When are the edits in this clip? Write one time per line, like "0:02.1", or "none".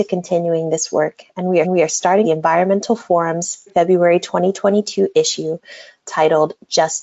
0:01.6
0:02.2
0:03.7